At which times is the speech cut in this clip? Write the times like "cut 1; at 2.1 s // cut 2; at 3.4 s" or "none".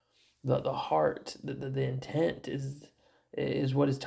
none